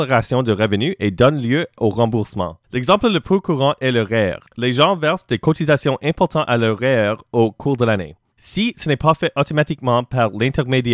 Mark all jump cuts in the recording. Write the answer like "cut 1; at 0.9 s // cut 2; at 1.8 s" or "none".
cut 1; at 2.6 s // cut 2; at 4.5 s